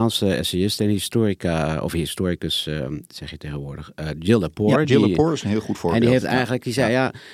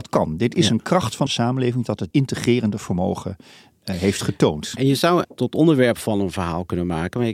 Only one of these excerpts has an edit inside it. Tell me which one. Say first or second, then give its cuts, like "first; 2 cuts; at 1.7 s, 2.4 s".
second; 3 cuts; at 1.3 s, 2.1 s, 5.2 s